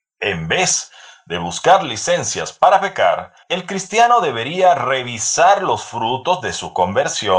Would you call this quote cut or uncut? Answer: cut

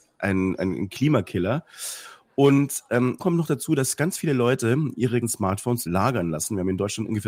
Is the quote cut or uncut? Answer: cut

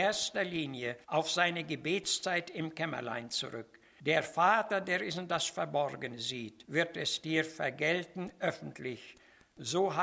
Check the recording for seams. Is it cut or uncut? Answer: cut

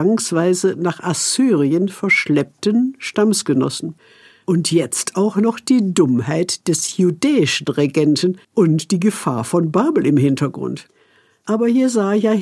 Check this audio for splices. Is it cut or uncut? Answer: cut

